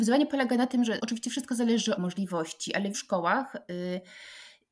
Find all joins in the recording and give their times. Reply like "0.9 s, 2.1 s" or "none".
1.0 s, 2.0 s, 2.9 s